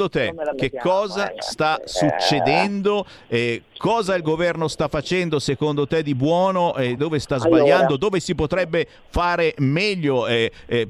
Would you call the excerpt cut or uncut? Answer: cut